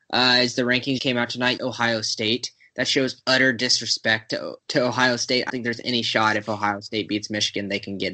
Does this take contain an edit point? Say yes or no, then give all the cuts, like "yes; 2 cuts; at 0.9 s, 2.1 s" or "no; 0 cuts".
yes; 4 cuts; at 1.0 s, 1.6 s, 4.6 s, 5.5 s